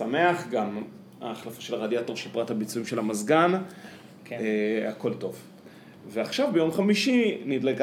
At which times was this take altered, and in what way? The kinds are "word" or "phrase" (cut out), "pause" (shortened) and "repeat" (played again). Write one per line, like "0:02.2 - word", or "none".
none